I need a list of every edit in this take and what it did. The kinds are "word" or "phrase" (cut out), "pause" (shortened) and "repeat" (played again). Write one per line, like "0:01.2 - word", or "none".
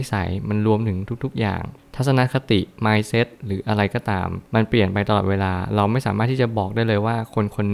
0:01.8 - pause
0:04.4 - pause